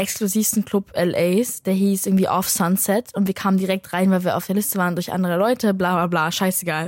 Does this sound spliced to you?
no; 0 cuts

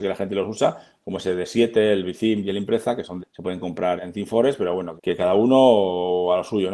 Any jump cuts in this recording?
yes; 3 cuts; at 3.2 s, 4.0 s, 5.0 s

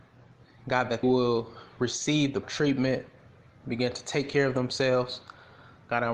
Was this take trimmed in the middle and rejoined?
yes; 2 cuts; at 1.0 s, 2.4 s

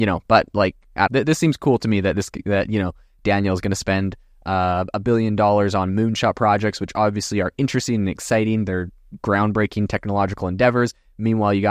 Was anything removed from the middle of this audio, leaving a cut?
yes; 1 cut; at 1.1 s

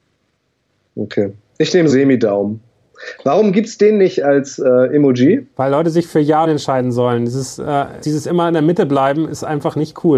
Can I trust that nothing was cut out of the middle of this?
no; 4 cuts; at 1.9 s, 5.5 s, 6.4 s, 8.0 s

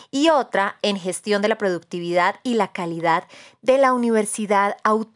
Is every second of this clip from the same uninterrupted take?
yes; 0 cuts

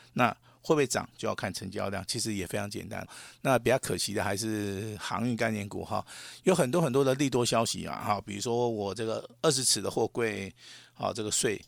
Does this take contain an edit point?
yes; 1 cut; at 3.0 s

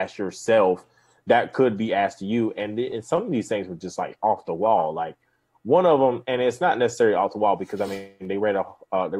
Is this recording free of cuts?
yes; 0 cuts

